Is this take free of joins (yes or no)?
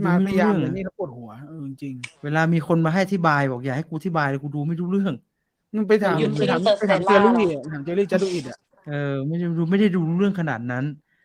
yes